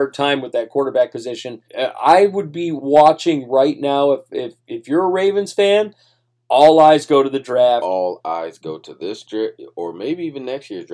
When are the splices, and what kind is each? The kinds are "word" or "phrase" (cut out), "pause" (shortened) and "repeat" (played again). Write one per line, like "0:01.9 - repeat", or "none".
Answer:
0:01.7 - pause
0:04.6 - pause